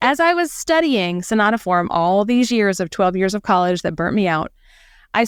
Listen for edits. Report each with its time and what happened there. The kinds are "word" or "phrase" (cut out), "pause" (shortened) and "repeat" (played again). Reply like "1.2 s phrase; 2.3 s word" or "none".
none